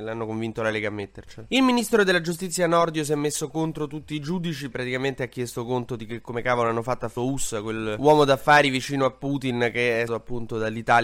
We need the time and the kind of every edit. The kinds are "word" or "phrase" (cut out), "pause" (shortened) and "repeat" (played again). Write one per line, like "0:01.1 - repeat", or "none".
0:04.7 - word
0:07.2 - phrase
0:10.1 - word